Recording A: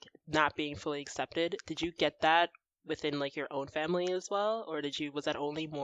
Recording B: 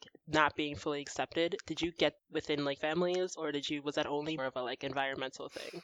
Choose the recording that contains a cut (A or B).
B